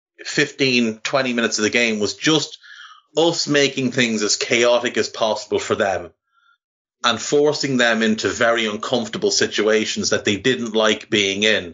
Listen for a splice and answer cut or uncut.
uncut